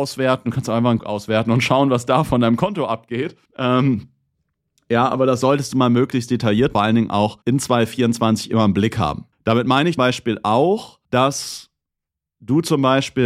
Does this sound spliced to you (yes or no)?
yes